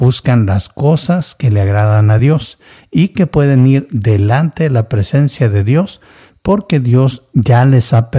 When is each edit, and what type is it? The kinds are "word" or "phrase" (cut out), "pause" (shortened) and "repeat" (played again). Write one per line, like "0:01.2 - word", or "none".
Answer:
none